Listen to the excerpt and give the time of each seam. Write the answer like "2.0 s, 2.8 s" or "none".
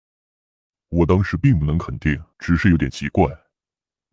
2.3 s

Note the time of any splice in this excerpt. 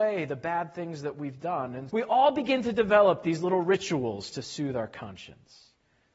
1.9 s

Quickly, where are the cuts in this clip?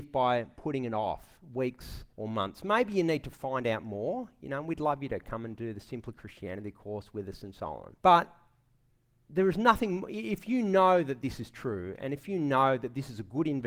2.1 s, 8.0 s

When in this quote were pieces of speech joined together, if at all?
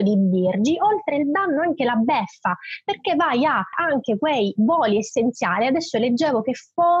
3.7 s

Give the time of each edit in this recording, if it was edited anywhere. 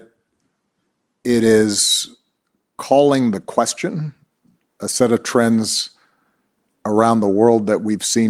4.7 s

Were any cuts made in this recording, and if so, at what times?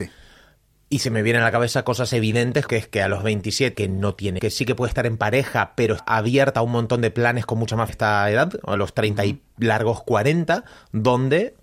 2.7 s, 3.7 s, 4.4 s, 6.0 s, 7.9 s

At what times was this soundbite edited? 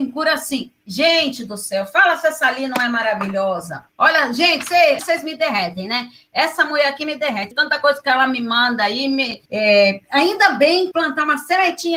3.9 s, 5.0 s, 7.5 s, 9.5 s, 10.9 s

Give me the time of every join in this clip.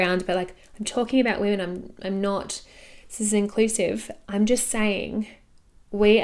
none

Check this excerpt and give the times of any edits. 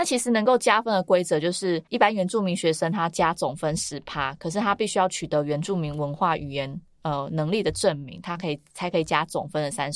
1.9 s

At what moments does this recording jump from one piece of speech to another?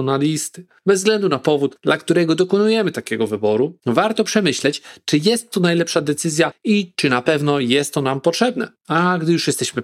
none

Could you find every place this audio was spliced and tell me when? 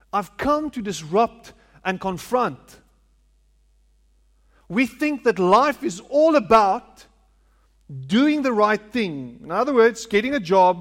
none

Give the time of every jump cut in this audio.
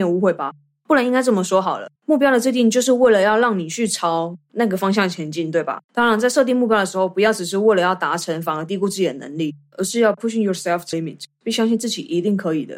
2.0 s, 5.8 s, 10.9 s

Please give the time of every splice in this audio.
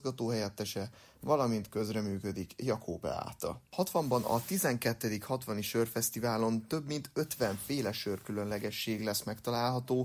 none

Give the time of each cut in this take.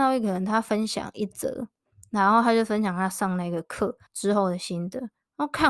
4.1 s

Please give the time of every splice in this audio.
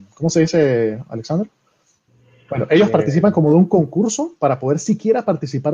none

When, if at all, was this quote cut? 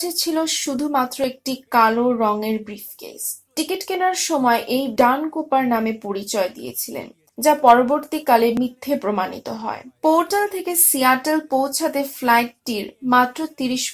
5.0 s

